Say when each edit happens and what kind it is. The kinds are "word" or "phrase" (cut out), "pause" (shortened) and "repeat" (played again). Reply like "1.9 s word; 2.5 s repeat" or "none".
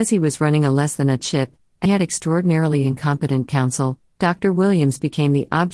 1.2 s word; 1.9 s word